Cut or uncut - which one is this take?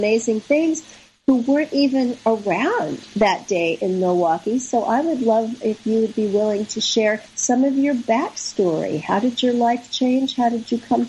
cut